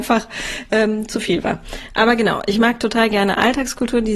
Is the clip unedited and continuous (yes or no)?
yes